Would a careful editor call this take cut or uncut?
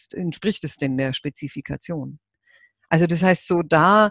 uncut